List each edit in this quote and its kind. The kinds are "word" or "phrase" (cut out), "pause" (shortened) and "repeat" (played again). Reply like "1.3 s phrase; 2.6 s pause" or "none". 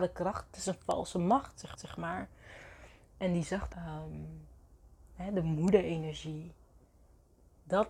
1.8 s repeat; 3.7 s word